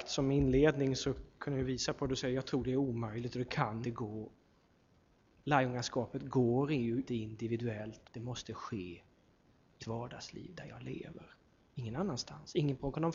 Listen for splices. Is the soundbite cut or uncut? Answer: cut